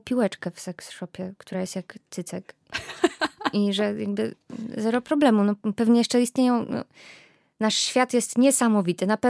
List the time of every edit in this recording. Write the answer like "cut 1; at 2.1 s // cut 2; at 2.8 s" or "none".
none